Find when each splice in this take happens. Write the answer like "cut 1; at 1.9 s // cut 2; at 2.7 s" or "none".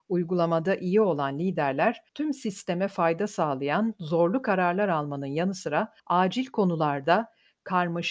cut 1; at 2.1 s // cut 2; at 6.0 s